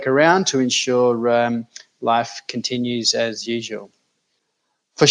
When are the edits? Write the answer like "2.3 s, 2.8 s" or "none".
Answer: none